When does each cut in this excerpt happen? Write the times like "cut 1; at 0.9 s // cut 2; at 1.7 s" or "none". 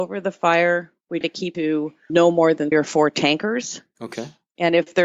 cut 1; at 1.2 s // cut 2; at 1.5 s // cut 3; at 2.1 s // cut 4; at 2.7 s